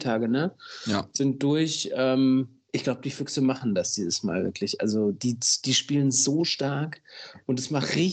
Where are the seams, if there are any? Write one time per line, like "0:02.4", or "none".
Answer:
none